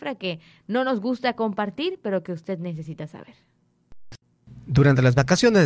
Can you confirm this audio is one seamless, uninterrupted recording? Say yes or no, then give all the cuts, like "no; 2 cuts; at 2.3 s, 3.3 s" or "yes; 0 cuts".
yes; 0 cuts